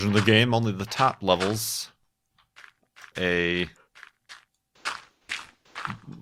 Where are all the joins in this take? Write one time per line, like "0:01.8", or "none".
0:03.1

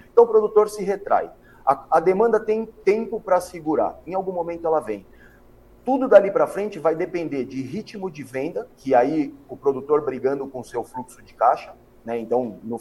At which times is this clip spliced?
none

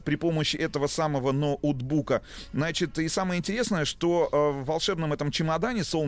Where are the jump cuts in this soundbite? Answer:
none

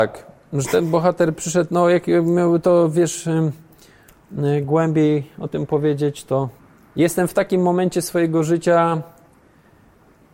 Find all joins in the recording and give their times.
none

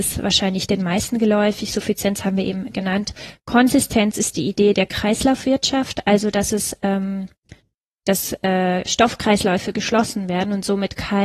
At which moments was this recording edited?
none

